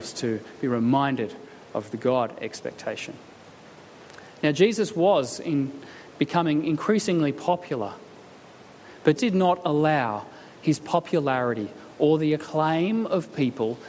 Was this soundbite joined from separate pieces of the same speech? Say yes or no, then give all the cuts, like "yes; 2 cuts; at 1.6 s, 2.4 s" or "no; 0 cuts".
yes; 1 cut; at 9.2 s